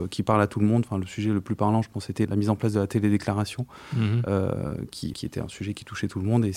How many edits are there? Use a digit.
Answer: 2